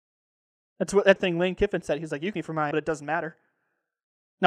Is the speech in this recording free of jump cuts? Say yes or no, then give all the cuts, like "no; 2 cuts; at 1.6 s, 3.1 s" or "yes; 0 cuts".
no; 3 cuts; at 1.2 s, 2.3 s, 2.7 s